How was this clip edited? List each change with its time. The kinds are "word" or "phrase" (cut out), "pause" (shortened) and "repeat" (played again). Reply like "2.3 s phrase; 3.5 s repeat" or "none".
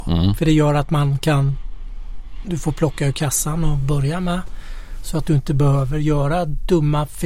none